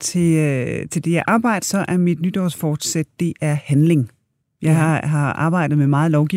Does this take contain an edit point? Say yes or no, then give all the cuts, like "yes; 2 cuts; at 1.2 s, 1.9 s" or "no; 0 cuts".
yes; 2 cuts; at 1.6 s, 4.4 s